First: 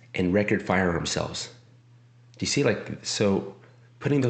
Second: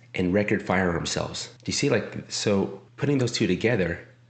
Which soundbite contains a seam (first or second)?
second